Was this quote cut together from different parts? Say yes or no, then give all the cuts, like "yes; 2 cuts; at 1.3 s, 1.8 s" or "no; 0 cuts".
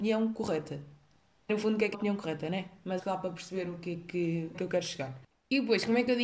yes; 4 cuts; at 1.5 s, 1.9 s, 3.0 s, 4.5 s